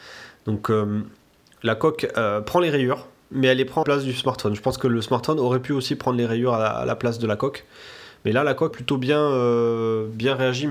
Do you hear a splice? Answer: yes; 2 cuts; at 3.8 s, 8.7 s

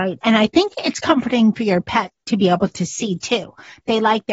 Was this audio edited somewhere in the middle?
no; 0 cuts

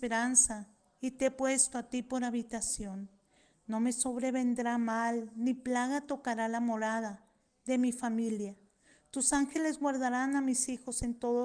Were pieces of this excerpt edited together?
no; 0 cuts

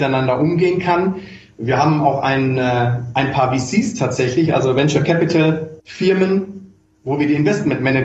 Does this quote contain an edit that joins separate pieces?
yes; 1 cut; at 5.8 s

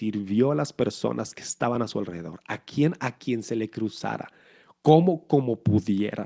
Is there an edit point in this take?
no; 0 cuts

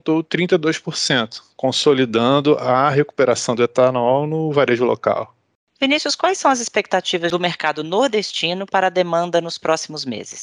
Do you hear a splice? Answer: no; 0 cuts

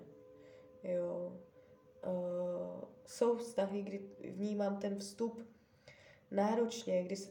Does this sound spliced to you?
no; 0 cuts

